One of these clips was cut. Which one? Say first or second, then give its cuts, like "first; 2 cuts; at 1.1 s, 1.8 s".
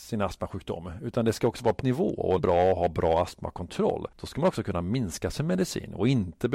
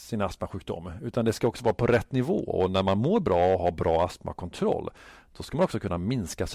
first; 3 cuts; at 1.8 s, 2.4 s, 4.1 s